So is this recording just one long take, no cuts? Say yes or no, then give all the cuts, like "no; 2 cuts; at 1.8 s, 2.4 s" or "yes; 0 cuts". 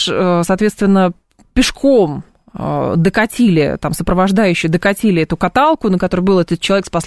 yes; 0 cuts